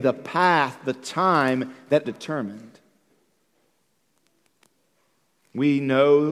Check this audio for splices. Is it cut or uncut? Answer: cut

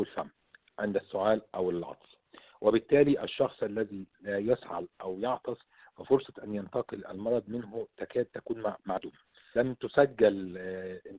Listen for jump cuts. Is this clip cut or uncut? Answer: uncut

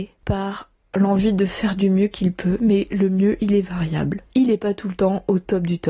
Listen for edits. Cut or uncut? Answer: uncut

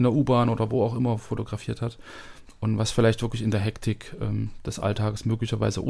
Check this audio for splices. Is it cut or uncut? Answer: uncut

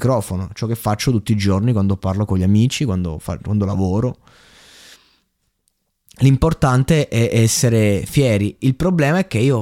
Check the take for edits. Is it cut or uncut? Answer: uncut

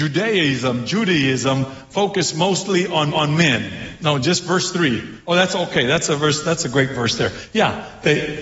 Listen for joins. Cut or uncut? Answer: cut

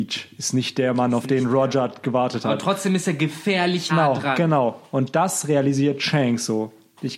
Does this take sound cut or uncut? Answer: cut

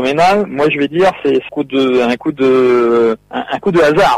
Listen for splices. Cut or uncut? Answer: cut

